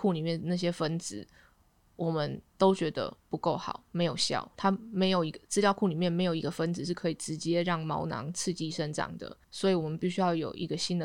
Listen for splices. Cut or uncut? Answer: cut